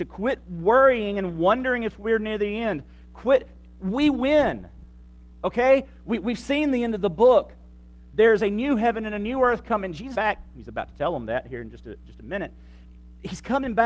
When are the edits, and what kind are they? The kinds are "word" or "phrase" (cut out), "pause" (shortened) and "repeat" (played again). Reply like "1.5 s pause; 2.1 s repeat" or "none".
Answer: 10.1 s phrase